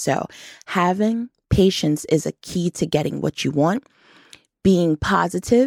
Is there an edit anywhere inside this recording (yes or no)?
no